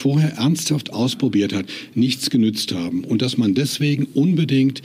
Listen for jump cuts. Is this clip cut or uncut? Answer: uncut